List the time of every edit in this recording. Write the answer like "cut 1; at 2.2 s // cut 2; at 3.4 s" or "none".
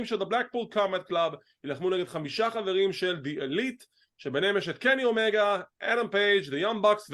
none